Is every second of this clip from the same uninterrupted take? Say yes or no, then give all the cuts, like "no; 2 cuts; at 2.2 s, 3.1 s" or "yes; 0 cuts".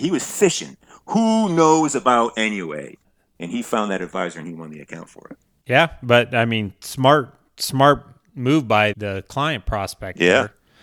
no; 1 cut; at 8.9 s